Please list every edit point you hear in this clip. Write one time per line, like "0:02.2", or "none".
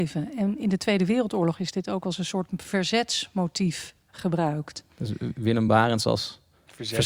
none